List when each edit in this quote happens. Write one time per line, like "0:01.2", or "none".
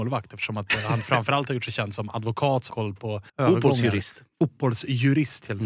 0:02.7
0:03.3